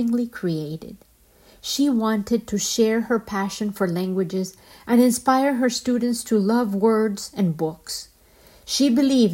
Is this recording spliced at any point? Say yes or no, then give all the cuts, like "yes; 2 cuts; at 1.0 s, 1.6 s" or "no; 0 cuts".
no; 0 cuts